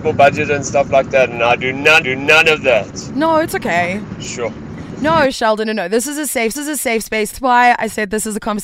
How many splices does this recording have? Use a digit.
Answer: 4